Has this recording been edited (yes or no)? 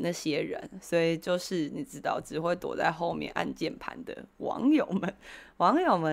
no